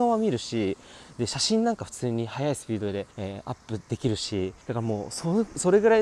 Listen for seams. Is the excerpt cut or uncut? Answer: cut